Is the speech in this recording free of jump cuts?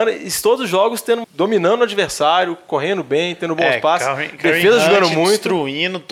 no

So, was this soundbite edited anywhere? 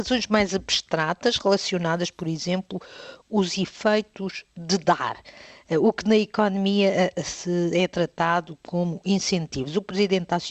yes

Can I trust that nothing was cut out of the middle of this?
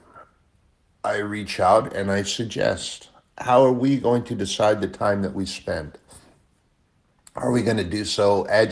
yes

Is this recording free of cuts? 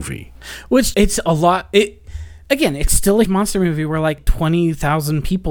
no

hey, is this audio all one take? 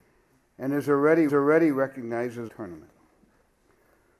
no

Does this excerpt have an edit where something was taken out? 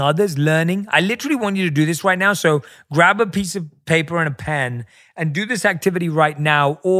no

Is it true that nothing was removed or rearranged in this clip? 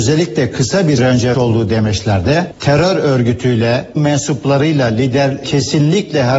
no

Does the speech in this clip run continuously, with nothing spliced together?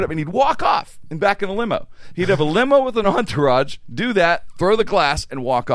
yes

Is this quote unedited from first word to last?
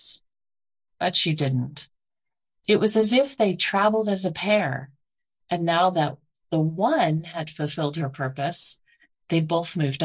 yes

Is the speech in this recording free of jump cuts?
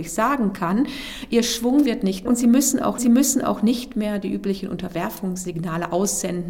no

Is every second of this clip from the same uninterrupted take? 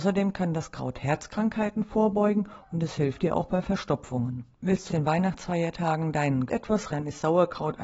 no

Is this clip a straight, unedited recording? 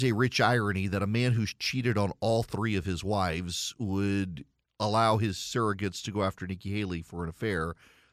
yes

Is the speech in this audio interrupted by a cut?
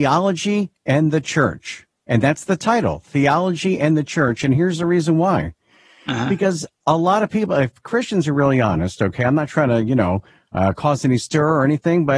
no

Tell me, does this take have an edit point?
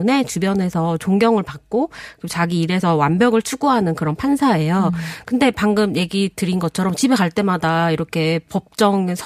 no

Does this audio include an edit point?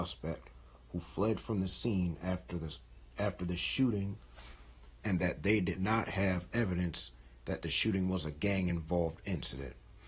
no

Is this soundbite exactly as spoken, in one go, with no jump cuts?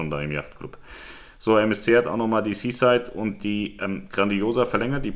yes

